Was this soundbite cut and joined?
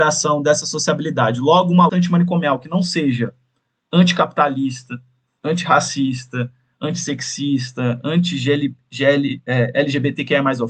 yes; 1 cut; at 1.9 s

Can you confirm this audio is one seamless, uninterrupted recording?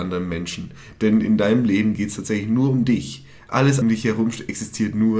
no; 1 cut; at 3.8 s

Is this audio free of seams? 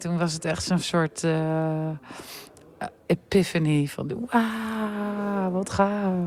yes; 0 cuts

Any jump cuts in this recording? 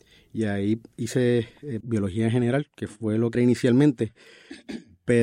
yes; 2 cuts; at 1.8 s, 3.3 s

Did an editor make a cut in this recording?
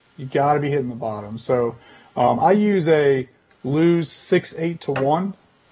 no; 0 cuts

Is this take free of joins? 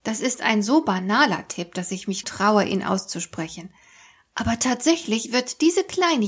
no; 1 cut; at 2.2 s

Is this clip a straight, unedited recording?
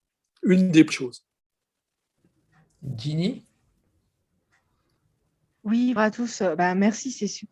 no; 2 cuts; at 0.9 s, 6.0 s

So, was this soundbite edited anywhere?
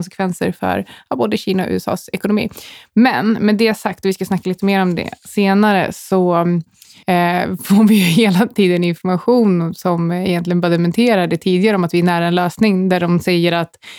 no; 0 cuts

